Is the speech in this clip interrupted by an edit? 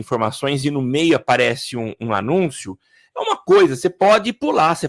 no; 0 cuts

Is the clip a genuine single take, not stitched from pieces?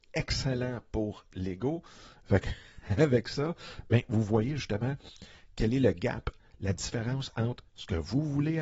yes; 0 cuts

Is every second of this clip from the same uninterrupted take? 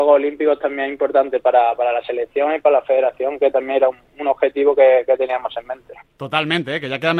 yes; 0 cuts

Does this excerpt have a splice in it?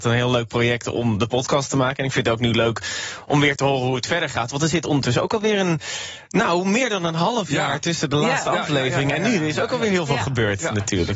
no; 0 cuts

